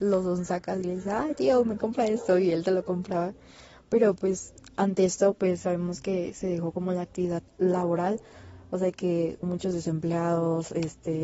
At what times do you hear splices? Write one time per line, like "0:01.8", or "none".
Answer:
0:07.5
0:09.4